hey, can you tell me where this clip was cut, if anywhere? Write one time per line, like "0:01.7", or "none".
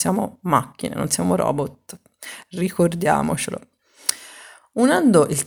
none